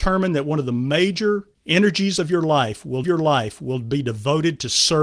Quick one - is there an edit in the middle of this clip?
yes; 1 cut; at 3.0 s

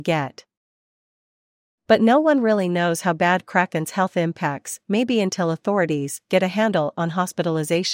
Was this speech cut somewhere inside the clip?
no; 0 cuts

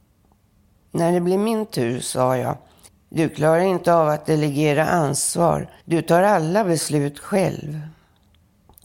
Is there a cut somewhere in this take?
yes; 2 cuts; at 2.9 s, 5.8 s

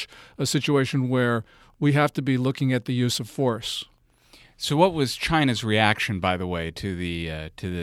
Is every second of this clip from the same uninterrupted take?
yes; 0 cuts

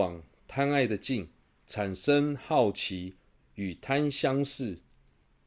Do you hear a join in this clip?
no; 0 cuts

